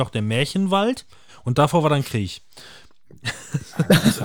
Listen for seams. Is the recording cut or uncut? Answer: uncut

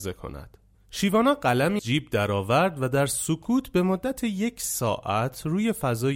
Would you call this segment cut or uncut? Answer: cut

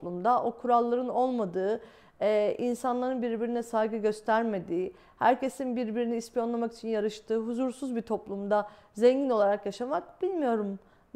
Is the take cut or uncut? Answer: uncut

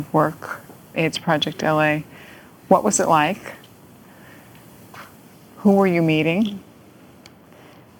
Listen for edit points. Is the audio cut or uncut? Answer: cut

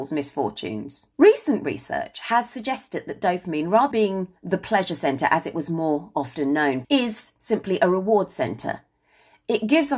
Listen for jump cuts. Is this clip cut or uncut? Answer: cut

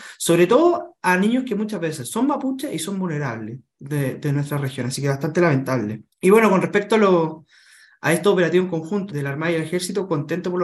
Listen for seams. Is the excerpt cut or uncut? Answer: cut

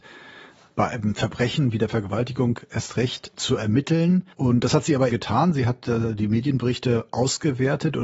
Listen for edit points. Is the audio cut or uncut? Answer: cut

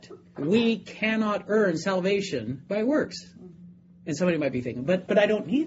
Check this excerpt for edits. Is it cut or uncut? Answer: uncut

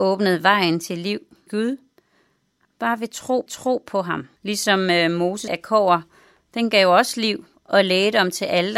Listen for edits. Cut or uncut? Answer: cut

